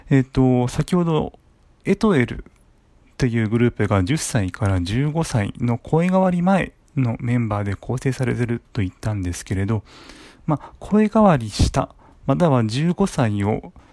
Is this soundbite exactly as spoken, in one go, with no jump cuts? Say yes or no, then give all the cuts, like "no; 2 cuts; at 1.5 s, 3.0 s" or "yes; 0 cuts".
yes; 0 cuts